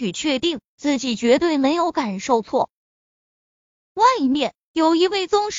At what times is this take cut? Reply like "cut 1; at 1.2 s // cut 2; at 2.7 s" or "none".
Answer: none